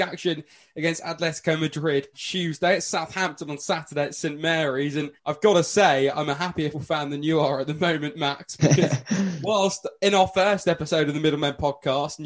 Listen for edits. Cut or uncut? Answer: cut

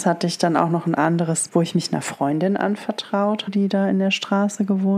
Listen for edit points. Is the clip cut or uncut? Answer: cut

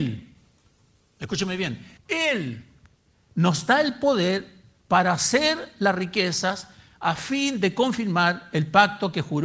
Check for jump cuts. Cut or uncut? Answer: cut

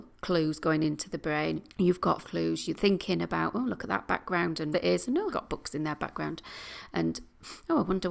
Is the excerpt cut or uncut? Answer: cut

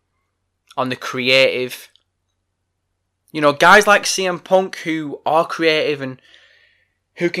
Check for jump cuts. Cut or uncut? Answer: uncut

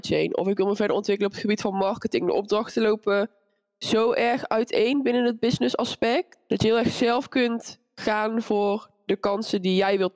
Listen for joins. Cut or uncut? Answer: uncut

